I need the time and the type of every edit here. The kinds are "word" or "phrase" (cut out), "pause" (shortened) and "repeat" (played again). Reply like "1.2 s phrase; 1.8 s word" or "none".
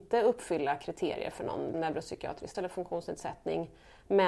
1.7 s word; 2.5 s word